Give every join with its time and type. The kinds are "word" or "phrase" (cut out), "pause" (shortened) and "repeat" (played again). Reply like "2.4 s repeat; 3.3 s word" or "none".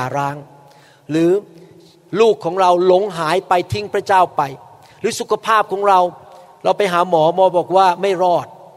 none

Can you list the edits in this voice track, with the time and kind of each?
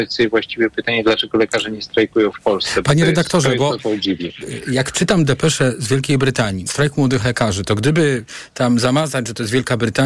6.7 s phrase

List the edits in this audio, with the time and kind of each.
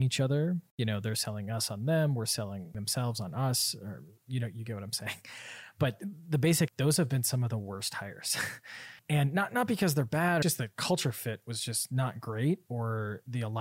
6.7 s phrase; 9.0 s pause; 10.4 s phrase

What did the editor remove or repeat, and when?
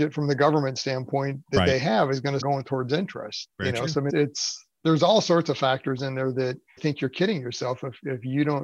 2.4 s word; 3.5 s pause; 4.1 s word; 6.8 s phrase

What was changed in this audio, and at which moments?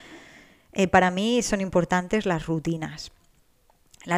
none

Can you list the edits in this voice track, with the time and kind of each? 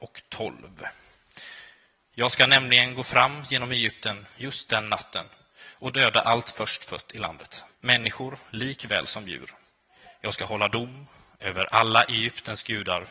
7.7 s pause

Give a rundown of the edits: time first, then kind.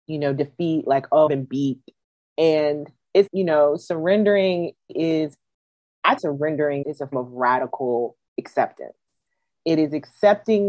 1.3 s word; 3.3 s word; 4.9 s word; 6.2 s word; 6.8 s word; 7.1 s word

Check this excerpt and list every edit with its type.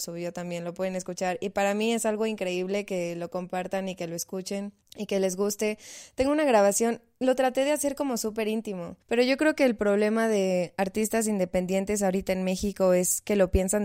4.8 s pause; 9.0 s pause

